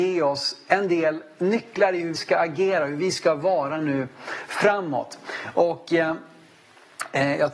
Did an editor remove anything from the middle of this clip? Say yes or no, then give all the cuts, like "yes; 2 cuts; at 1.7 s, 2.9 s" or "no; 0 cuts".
yes; 1 cut; at 2.2 s